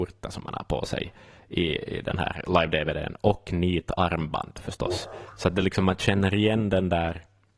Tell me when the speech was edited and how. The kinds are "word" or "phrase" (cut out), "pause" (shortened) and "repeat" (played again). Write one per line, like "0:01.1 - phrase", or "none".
none